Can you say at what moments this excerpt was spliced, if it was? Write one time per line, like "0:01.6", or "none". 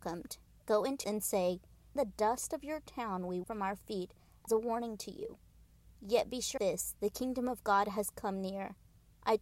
0:01.0
0:02.0
0:03.4
0:04.5
0:05.9
0:06.6